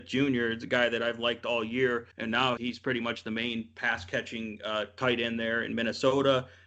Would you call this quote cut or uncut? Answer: cut